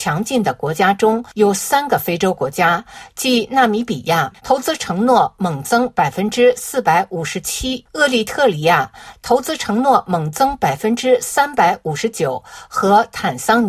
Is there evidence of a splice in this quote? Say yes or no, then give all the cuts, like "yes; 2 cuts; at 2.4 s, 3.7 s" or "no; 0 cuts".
yes; 1 cut; at 4.4 s